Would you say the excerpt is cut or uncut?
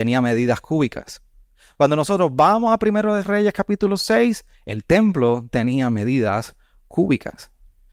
uncut